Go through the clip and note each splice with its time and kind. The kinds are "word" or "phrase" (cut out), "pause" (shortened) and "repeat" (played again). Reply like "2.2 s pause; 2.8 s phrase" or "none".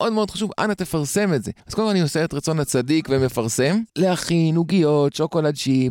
1.6 s pause; 3.9 s pause